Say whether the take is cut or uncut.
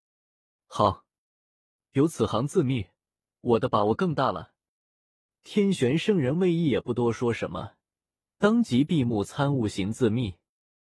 uncut